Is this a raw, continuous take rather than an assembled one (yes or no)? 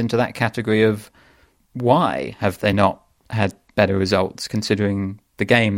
yes